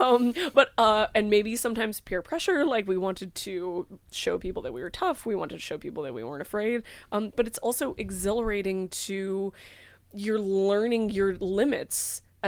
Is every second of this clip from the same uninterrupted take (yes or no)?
yes